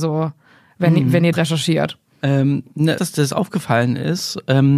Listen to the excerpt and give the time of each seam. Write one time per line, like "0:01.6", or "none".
0:01.3
0:03.0